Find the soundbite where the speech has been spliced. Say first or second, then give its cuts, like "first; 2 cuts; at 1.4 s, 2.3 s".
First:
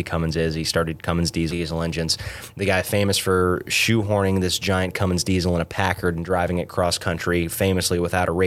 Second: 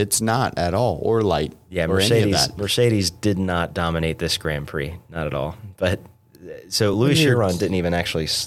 first; 1 cut; at 1.5 s